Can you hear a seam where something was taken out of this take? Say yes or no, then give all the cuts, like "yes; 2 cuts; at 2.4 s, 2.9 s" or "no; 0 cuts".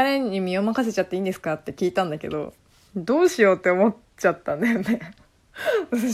no; 0 cuts